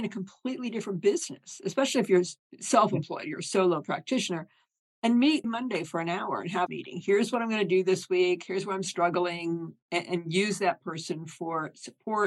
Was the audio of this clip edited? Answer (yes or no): yes